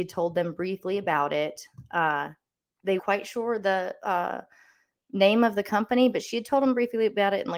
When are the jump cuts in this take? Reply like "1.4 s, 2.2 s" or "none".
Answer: 3.0 s